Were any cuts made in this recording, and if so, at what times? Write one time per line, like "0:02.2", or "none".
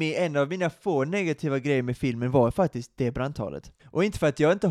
0:03.8